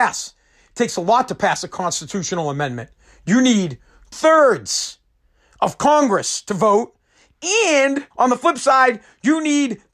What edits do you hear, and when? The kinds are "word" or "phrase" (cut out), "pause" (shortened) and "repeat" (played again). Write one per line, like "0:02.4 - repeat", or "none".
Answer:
0:04.1 - word
0:08.1 - pause